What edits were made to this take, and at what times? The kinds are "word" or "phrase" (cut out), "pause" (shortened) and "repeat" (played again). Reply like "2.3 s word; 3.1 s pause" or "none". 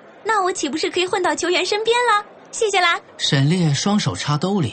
2.4 s pause; 3.1 s pause